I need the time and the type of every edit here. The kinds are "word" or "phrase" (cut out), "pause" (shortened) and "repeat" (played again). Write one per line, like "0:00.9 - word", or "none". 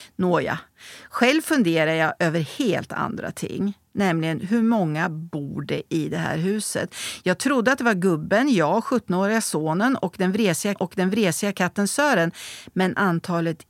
0:05.9 - word
0:10.8 - repeat